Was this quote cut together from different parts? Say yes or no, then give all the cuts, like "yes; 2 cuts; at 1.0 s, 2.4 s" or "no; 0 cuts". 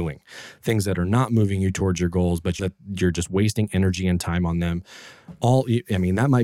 yes; 1 cut; at 2.6 s